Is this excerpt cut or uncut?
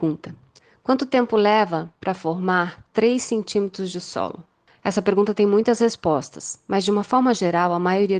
uncut